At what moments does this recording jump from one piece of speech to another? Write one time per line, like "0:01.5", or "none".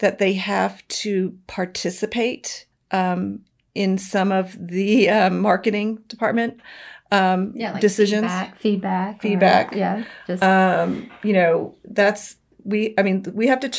0:02.7
0:12.5